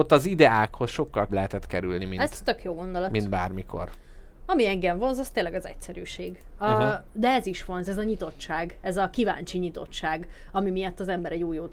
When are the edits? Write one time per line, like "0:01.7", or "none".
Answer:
0:01.3